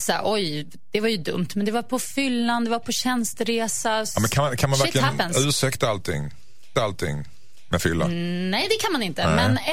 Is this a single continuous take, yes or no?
no